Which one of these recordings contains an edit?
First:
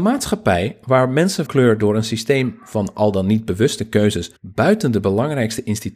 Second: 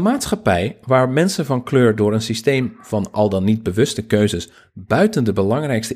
first; 2 cuts; at 1.5 s, 4.4 s

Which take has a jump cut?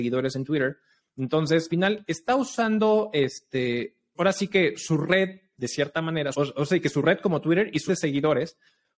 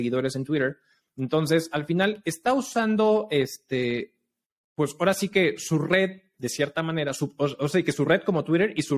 first; 4 cuts; at 1.7 s, 4.1 s, 6.3 s, 7.9 s

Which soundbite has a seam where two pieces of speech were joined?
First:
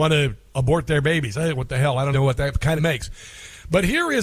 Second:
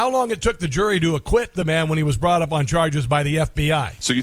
first; 2 cuts; at 2.1 s, 2.8 s

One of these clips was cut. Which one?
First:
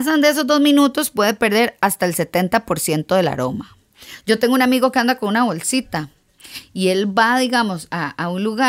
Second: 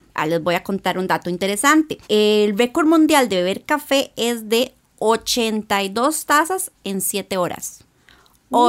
second; 2 cuts; at 2.0 s, 6.8 s

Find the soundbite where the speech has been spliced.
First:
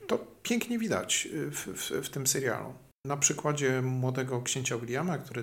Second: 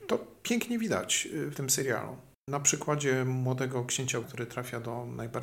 second; 2 cuts; at 1.5 s, 4.2 s

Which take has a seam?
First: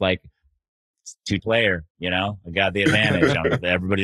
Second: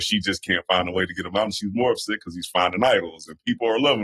first; 1 cut; at 1.4 s

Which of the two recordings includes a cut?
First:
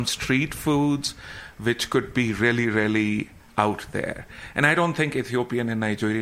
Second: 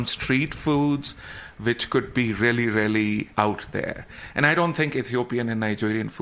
second; 1 cut; at 3.3 s

